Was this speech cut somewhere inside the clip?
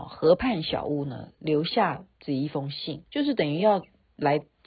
yes; 2 cuts; at 2.1 s, 3.1 s

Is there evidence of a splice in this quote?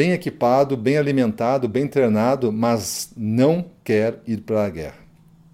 no; 0 cuts

